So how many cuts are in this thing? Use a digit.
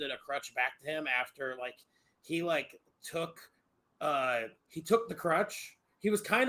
1